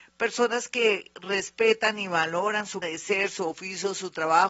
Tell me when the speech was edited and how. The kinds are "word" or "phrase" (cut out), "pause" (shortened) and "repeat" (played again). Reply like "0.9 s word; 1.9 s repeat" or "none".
2.8 s word